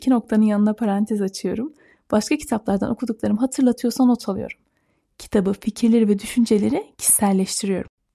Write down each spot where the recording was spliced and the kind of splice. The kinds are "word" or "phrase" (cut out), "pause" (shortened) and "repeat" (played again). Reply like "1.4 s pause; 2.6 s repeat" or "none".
none